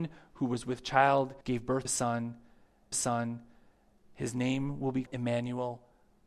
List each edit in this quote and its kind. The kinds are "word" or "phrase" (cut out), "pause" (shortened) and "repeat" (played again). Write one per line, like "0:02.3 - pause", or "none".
0:01.4 - pause
0:01.8 - word
0:02.9 - repeat
0:05.1 - word

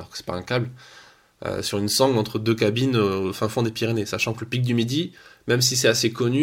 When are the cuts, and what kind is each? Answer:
none

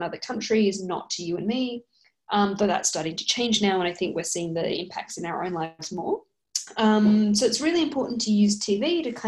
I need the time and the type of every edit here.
none

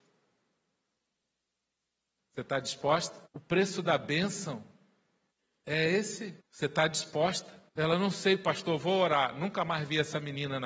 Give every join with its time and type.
0:03.3 - pause
0:05.3 - pause
0:06.4 - pause
0:07.7 - pause

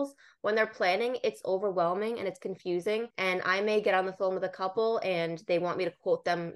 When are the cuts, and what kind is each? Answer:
0:03.1 - pause

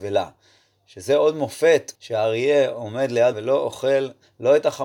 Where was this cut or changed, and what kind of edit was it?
0:02.0 - pause
0:03.3 - word

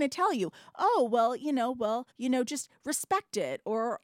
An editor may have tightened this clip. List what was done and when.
0:02.1 - pause

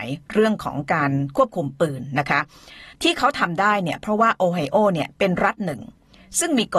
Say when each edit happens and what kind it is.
0:02.9 - pause

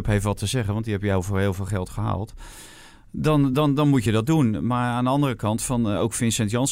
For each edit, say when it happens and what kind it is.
none

